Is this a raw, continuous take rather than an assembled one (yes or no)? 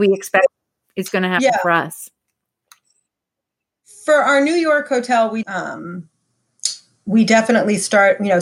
no